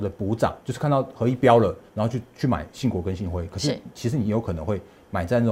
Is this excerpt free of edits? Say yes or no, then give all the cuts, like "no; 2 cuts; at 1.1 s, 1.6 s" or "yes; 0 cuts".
no; 1 cut; at 1.9 s